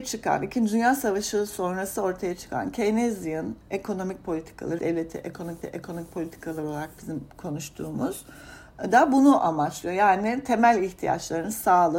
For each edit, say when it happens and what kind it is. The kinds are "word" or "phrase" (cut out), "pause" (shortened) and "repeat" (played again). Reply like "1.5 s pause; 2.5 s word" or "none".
3.6 s pause; 4.8 s word; 5.6 s repeat